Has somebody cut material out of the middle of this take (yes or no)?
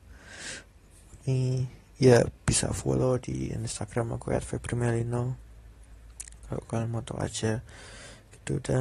yes